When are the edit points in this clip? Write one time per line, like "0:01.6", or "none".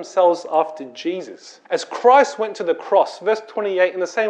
0:01.6